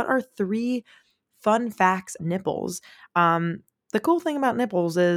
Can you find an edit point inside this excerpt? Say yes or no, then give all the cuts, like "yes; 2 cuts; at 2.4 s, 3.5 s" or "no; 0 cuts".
yes; 1 cut; at 2.2 s